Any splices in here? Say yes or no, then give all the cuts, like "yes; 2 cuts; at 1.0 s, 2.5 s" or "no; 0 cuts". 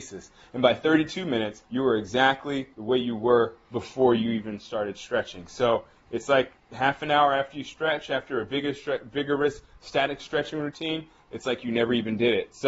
yes; 2 cuts; at 1.6 s, 2.7 s